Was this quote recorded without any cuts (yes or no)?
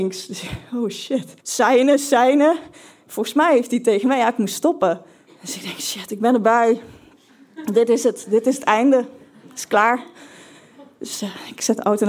no